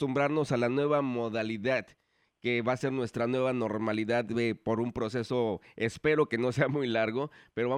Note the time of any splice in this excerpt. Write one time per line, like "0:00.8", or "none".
none